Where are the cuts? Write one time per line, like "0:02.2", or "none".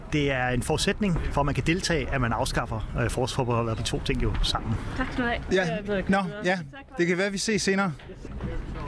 0:03.8
0:05.8